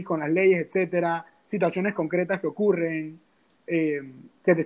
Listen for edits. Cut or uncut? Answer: uncut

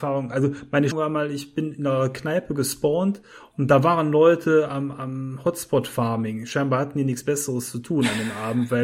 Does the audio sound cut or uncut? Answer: cut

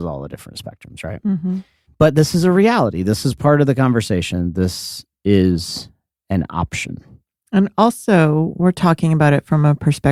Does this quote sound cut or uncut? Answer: uncut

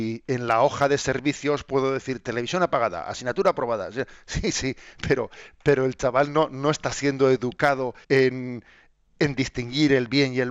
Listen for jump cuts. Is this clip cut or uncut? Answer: cut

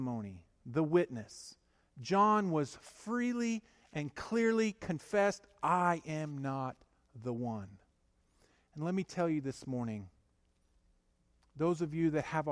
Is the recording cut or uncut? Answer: uncut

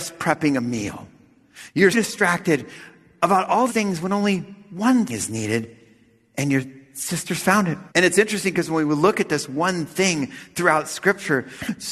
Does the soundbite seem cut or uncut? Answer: cut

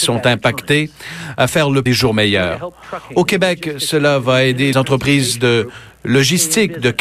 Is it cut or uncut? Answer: cut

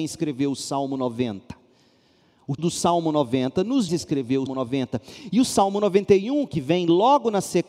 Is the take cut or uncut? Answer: cut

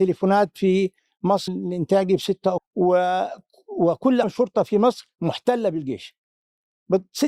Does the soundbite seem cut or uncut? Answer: cut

